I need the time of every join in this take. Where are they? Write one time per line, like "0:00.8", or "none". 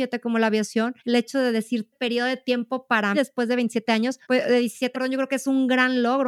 0:01.0
0:01.9
0:03.1
0:04.2
0:04.9